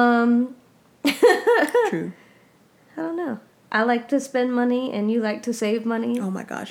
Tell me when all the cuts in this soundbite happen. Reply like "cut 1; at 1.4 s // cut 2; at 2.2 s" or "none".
none